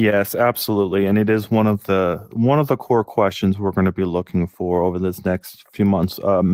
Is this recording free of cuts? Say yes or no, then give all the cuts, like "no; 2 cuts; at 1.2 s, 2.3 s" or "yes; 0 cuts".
yes; 0 cuts